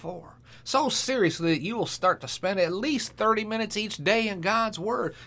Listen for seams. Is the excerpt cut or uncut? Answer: uncut